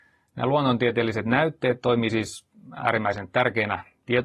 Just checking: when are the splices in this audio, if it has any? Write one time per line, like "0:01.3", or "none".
none